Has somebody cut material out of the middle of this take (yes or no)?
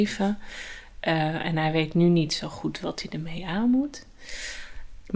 no